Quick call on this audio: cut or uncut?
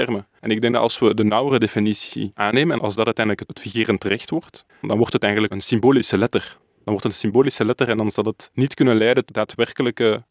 cut